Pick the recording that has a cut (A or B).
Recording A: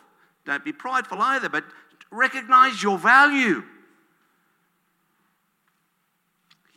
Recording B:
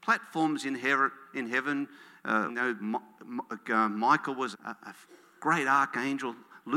B